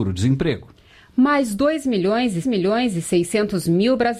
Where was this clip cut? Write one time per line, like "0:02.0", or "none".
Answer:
0:02.4